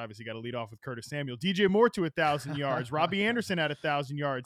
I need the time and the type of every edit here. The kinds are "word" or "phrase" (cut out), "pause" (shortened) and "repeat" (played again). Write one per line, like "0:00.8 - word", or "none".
none

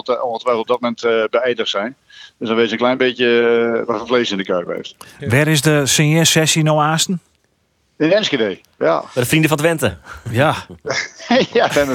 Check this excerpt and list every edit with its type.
none

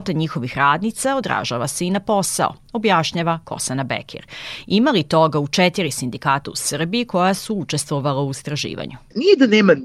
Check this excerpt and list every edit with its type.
none

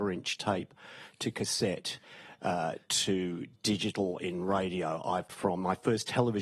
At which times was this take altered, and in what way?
0:05.3 - word

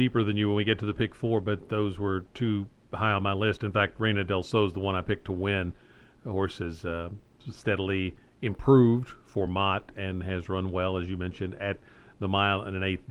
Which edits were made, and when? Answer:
none

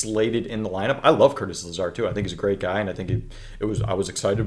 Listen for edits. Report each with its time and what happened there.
none

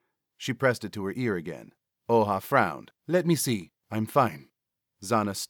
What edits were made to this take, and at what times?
0:01.8 - pause
0:03.0 - pause
0:03.8 - pause

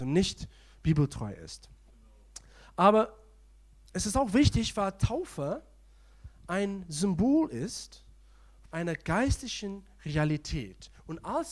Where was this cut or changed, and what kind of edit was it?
0:08.7 - word

